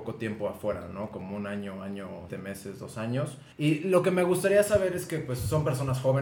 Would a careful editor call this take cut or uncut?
cut